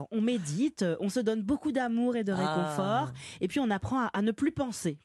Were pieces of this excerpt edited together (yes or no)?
no